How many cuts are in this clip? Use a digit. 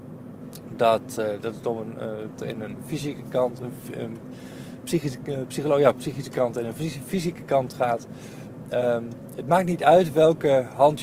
1